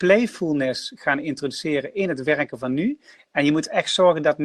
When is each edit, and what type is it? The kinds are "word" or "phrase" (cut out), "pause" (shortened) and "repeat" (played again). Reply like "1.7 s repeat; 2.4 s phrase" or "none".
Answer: none